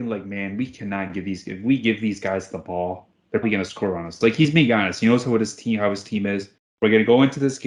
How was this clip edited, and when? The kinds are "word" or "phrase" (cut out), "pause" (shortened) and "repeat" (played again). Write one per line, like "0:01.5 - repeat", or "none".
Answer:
0:03.4 - word
0:06.6 - pause